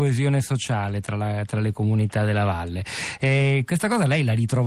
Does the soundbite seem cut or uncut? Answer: uncut